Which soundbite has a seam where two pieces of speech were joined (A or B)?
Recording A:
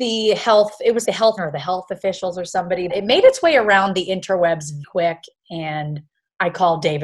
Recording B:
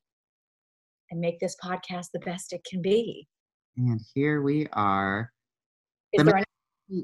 A